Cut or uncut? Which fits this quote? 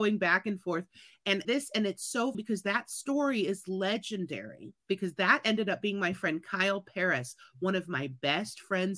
cut